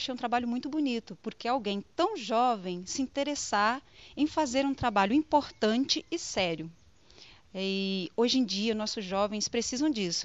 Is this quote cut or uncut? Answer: uncut